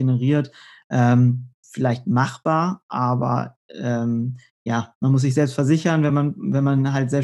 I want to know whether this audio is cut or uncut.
uncut